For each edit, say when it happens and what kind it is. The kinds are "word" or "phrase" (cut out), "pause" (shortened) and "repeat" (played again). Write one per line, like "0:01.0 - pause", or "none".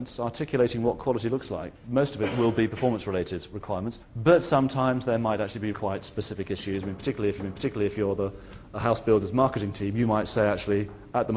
0:01.8 - pause
0:04.0 - pause
0:05.7 - word
0:07.4 - repeat